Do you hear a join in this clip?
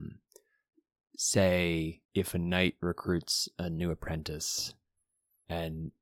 yes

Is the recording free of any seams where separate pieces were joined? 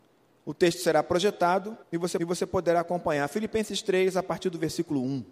no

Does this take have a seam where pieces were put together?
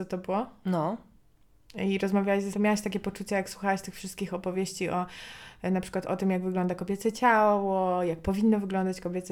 yes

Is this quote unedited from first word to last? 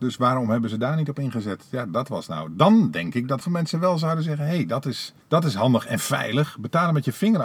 no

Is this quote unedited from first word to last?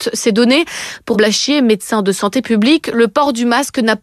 no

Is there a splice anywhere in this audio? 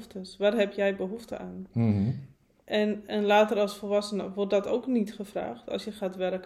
no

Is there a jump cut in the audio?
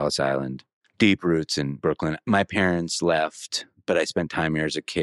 no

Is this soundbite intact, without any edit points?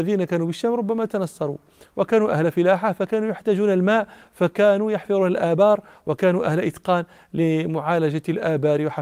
yes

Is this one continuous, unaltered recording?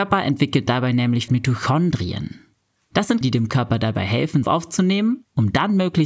no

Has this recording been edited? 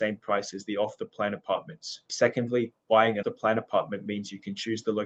yes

